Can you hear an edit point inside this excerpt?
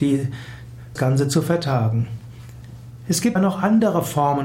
yes; 2 cuts; at 1.0 s, 3.4 s

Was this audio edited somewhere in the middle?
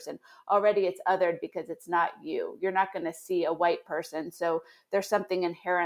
no; 0 cuts

